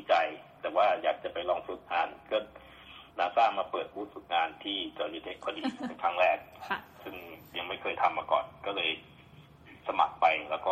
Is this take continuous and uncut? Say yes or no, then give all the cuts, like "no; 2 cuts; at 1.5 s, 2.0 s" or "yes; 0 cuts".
no; 1 cut; at 3.1 s